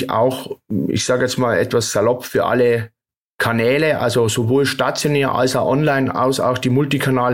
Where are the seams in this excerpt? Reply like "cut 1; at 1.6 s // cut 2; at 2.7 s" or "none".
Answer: none